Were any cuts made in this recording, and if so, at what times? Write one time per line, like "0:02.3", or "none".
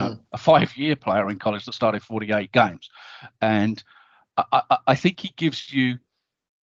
none